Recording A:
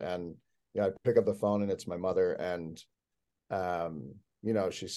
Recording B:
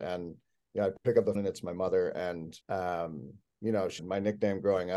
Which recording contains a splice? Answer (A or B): B